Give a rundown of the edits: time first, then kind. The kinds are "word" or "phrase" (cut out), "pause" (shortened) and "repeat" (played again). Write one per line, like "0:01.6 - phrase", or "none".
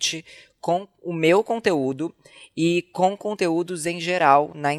none